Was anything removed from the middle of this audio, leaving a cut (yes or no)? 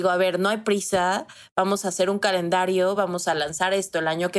no